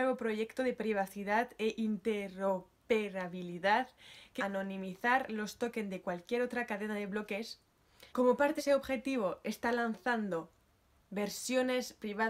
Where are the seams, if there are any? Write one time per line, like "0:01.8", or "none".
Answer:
0:04.4
0:08.1
0:08.6